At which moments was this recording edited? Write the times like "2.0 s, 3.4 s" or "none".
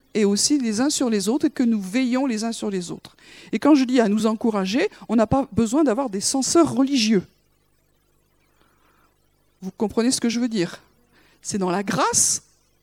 none